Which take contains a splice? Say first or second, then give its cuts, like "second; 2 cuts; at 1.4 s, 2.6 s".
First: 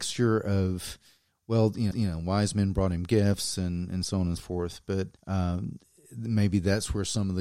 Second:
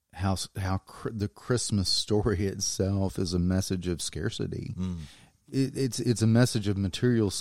first; 3 cuts; at 1.9 s, 4.4 s, 5.2 s